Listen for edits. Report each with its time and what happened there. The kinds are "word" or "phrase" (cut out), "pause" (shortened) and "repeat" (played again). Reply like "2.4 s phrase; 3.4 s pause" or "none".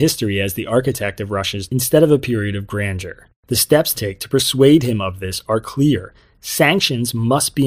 1.7 s word; 3.3 s pause; 3.9 s phrase